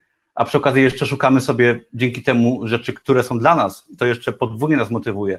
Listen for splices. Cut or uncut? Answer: uncut